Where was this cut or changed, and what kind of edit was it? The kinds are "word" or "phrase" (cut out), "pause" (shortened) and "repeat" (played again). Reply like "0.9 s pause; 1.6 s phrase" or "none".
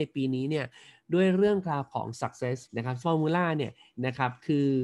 2.7 s word; 3.0 s word